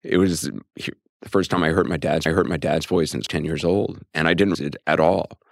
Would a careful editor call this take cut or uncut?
cut